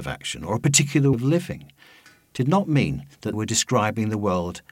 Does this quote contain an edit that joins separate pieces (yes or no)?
yes